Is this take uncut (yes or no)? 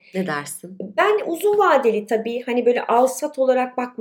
yes